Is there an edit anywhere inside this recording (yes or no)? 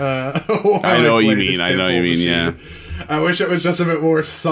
no